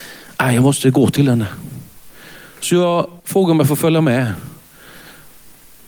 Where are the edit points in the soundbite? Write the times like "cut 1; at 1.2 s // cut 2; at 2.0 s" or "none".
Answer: cut 1; at 3.2 s

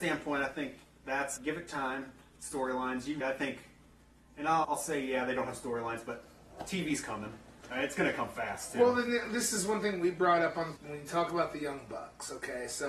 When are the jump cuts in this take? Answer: cut 1; at 1.4 s // cut 2; at 3.2 s // cut 3; at 4.6 s // cut 4; at 10.8 s

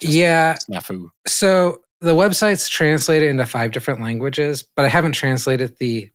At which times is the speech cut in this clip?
cut 1; at 1.2 s

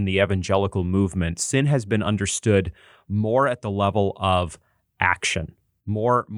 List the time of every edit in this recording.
none

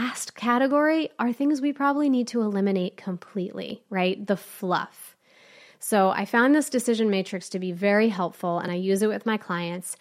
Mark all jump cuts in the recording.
none

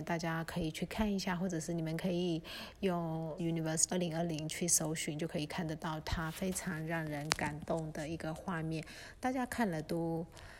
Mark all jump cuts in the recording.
cut 1; at 3.4 s // cut 2; at 3.9 s

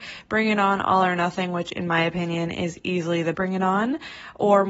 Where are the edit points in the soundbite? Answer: cut 1; at 3.3 s

